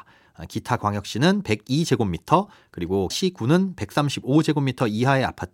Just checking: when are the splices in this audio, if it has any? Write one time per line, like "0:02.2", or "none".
0:03.1